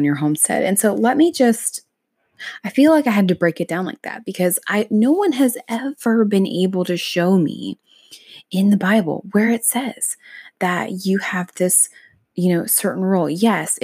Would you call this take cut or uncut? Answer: uncut